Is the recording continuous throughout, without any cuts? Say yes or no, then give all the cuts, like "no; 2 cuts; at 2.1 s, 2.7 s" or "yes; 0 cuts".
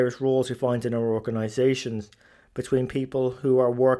yes; 0 cuts